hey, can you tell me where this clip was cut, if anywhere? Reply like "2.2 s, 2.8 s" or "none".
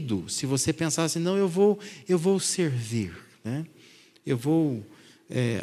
none